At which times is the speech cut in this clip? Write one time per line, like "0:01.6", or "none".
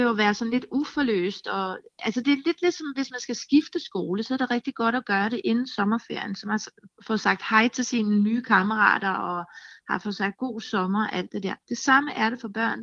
0:06.9
0:11.6